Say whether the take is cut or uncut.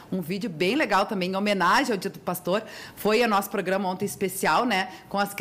uncut